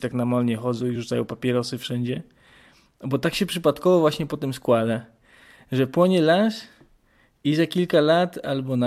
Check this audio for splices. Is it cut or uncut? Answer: uncut